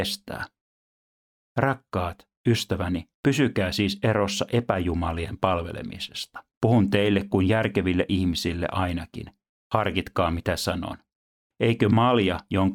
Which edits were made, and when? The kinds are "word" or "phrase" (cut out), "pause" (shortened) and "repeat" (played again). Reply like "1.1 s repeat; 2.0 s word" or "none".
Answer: 3.1 s pause; 6.5 s pause